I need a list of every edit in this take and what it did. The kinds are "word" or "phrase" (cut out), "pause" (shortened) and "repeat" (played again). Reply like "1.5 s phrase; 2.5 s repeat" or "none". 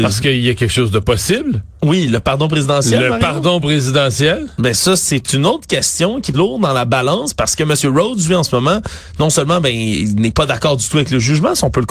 6.3 s word